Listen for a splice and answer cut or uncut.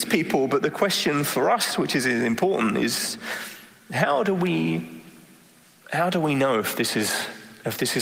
uncut